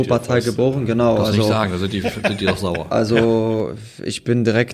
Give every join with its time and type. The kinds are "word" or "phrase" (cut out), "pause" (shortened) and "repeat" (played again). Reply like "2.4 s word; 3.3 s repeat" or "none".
none

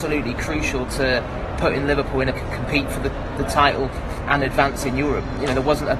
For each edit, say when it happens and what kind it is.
2.3 s phrase; 4.3 s word

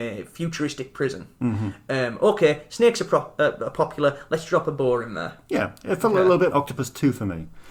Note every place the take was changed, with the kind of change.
6.5 s word

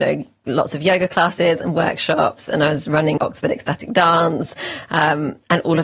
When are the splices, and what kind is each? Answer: 3.2 s word

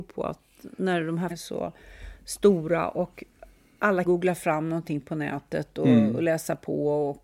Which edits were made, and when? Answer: 1.3 s word; 4.0 s word

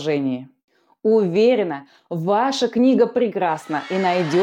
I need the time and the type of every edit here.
none

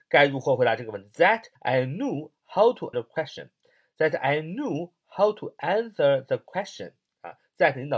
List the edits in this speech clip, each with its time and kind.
1.6 s pause; 2.9 s word

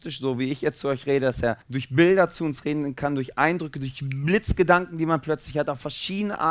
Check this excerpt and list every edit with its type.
1.6 s pause

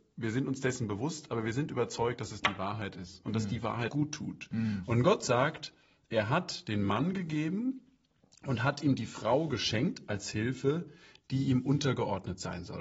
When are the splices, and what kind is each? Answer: 3.9 s word

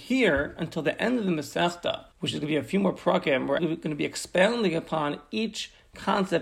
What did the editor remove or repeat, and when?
2.1 s pause; 3.6 s word

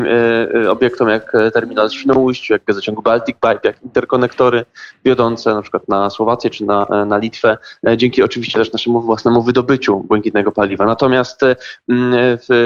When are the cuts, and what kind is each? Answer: none

